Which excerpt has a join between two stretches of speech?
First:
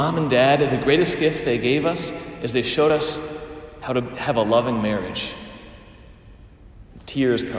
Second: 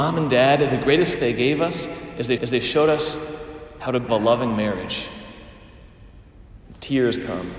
second; 3 cuts; at 1.2 s, 2.4 s, 4.1 s

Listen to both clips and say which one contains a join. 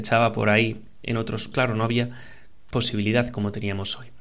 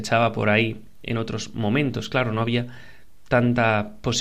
first; 2 cuts; at 1.5 s, 2.7 s

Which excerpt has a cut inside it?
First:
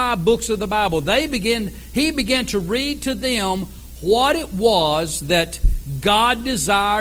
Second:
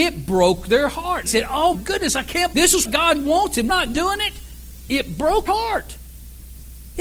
second; 6 cuts; at 1.3 s, 1.7 s, 2.5 s, 2.8 s, 3.7 s, 5.5 s

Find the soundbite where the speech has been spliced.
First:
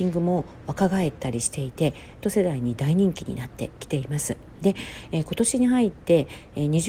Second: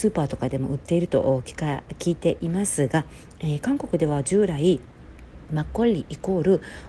first; 1 cut; at 2.2 s

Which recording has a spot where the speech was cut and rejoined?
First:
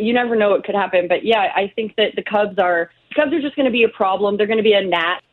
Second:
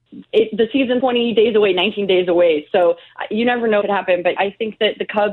second; 3 cuts; at 1.0 s, 3.8 s, 4.4 s

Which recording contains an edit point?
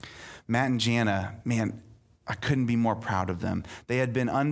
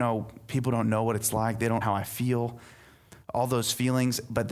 second; 1 cut; at 1.8 s

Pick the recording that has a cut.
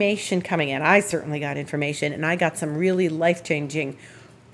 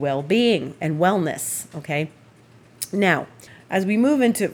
second; 1 cut; at 3.5 s

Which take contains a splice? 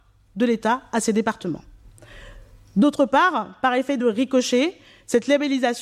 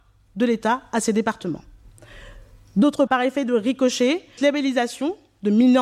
second; 2 cuts; at 3.1 s, 4.4 s

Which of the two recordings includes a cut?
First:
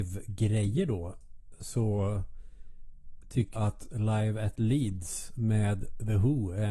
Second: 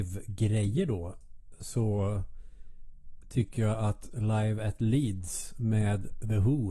first; 1 cut; at 3.6 s

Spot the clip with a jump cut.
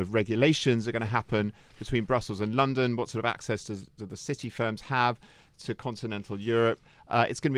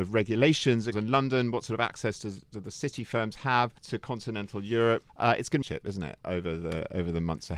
second; 4 cuts; at 0.9 s, 3.8 s, 5.1 s, 5.6 s

